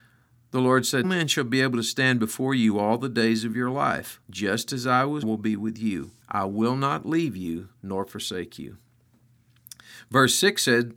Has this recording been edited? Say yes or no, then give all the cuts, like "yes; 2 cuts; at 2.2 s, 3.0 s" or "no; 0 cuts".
yes; 4 cuts; at 1.0 s, 4.2 s, 5.2 s, 6.2 s